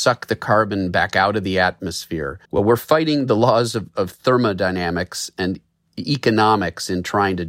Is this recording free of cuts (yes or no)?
no